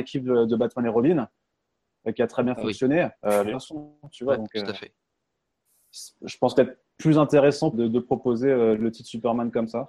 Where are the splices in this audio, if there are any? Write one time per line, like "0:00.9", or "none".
0:03.1
0:06.5
0:07.7